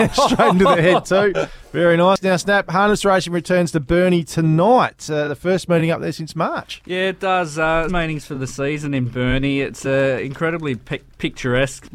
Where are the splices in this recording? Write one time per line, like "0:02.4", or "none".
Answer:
0:07.9